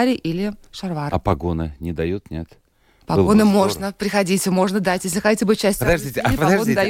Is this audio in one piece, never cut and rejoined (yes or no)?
yes